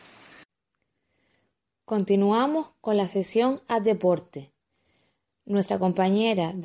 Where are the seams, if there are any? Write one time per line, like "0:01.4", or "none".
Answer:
none